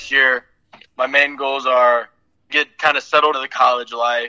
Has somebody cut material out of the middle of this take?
yes; 2 cuts; at 2.5 s, 3.3 s

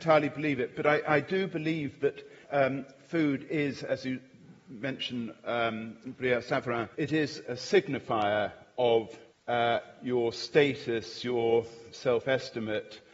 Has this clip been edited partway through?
yes; 4 cuts; at 2.4 s, 6.9 s, 7.4 s, 9.3 s

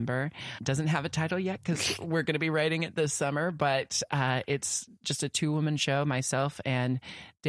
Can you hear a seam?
no; 0 cuts

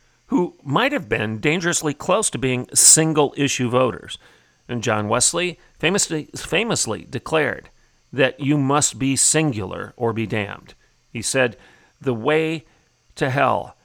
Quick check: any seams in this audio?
no; 0 cuts

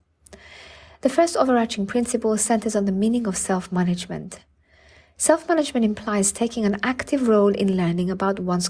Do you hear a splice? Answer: no; 0 cuts

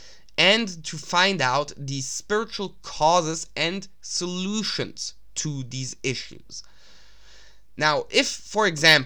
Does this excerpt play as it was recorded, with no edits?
yes; 0 cuts

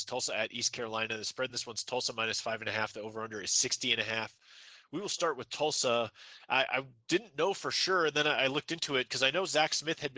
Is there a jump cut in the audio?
no; 0 cuts

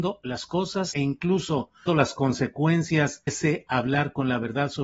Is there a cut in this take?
yes; 3 cuts; at 0.9 s, 1.9 s, 3.3 s

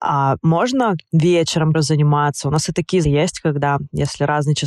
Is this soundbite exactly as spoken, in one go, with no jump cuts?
no; 2 cuts; at 1.7 s, 3.0 s

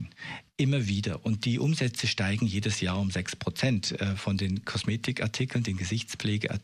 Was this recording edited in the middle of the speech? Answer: no; 0 cuts

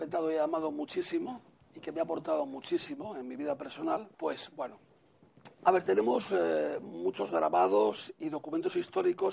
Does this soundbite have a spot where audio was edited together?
yes; 3 cuts; at 1.5 s, 4.1 s, 5.5 s

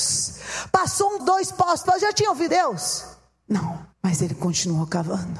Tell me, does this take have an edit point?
yes; 4 cuts; at 1.2 s, 1.8 s, 2.5 s, 3.9 s

